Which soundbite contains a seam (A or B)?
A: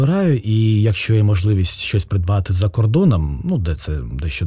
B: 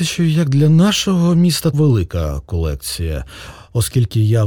B